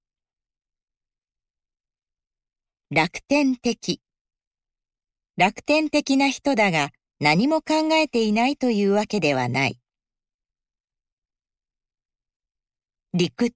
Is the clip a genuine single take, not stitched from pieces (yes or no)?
yes